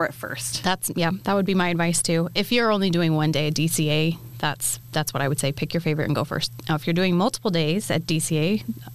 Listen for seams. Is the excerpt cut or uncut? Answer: uncut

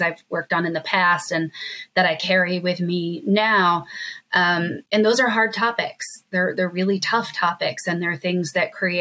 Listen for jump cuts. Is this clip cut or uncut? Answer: uncut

